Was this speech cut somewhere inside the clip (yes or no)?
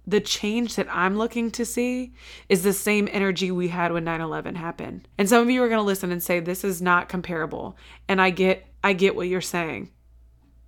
yes